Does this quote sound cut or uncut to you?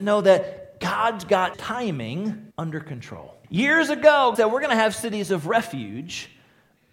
cut